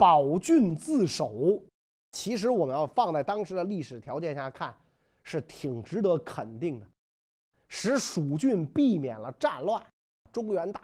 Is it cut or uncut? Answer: uncut